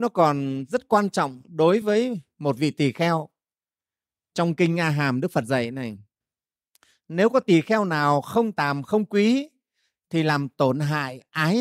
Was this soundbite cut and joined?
no; 0 cuts

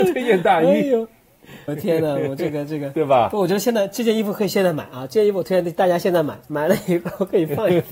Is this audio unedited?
no; 1 cut; at 1.7 s

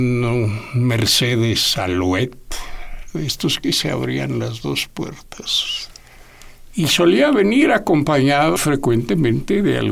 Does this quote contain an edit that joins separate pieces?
yes; 1 cut; at 8.6 s

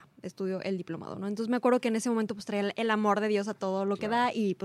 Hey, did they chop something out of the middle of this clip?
no; 0 cuts

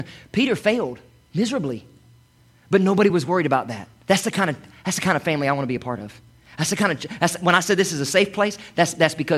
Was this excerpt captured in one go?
yes; 0 cuts

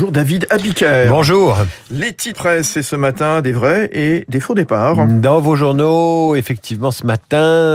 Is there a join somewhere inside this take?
yes; 1 cut; at 2.3 s

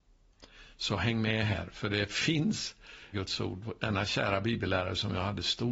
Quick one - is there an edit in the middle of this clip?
yes; 1 cut; at 3.1 s

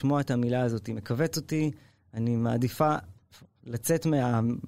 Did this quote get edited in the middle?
no; 0 cuts

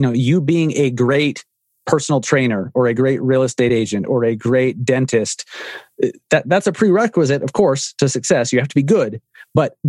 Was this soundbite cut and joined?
no; 0 cuts

